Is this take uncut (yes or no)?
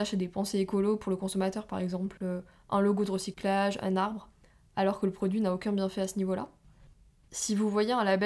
yes